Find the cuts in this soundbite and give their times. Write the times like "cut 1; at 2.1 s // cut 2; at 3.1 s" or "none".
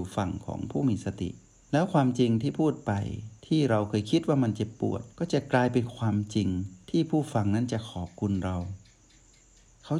cut 1; at 1.4 s // cut 2; at 3.4 s // cut 3; at 5.1 s // cut 4; at 6.8 s